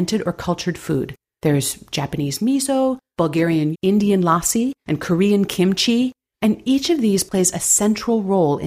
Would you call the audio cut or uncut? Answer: cut